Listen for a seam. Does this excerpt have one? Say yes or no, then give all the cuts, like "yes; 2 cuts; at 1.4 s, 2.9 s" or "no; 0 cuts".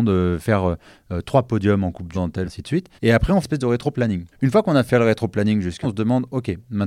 yes; 6 cuts; at 2.1 s, 2.4 s, 3.0 s, 3.4 s, 4.3 s, 5.8 s